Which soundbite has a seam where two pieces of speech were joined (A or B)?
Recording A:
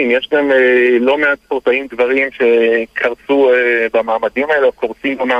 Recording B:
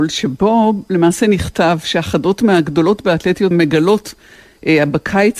B